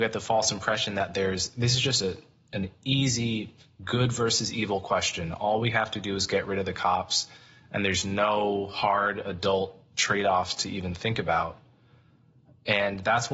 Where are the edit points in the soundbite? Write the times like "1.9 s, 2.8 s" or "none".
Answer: none